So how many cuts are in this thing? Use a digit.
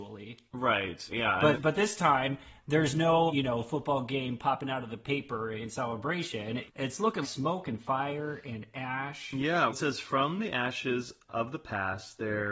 6